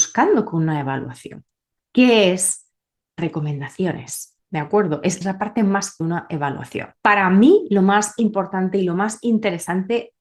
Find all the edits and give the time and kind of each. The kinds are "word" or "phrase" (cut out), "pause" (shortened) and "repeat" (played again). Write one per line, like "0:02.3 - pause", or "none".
0:01.7 - pause
0:03.2 - word
0:04.4 - pause
0:05.2 - phrase
0:06.0 - phrase
0:06.9 - pause